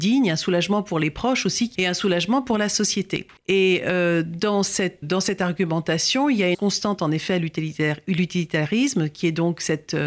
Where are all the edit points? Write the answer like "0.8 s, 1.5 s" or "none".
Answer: 1.7 s, 3.4 s, 5.0 s, 6.5 s